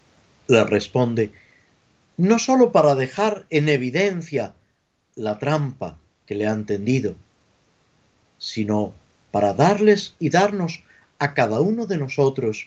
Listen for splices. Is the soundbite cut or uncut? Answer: uncut